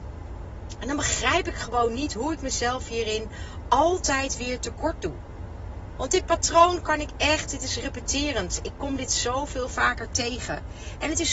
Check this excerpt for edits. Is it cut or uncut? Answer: uncut